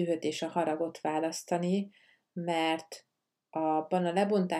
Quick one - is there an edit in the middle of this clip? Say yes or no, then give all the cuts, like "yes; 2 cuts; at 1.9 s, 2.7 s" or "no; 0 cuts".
no; 0 cuts